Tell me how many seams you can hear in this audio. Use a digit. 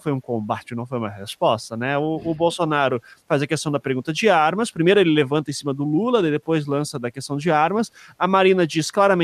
0